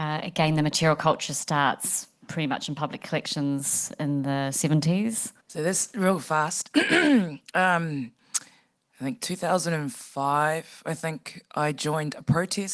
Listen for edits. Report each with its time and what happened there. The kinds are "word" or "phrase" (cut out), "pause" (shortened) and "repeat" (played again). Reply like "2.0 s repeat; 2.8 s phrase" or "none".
5.4 s pause